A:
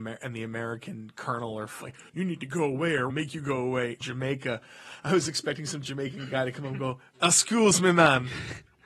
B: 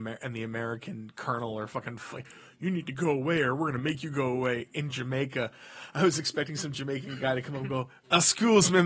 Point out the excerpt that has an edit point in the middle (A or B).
A